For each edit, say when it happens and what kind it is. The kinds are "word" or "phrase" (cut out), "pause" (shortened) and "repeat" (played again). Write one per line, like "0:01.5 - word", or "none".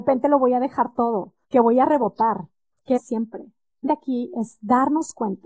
0:01.4 - pause
0:03.0 - phrase
0:03.9 - word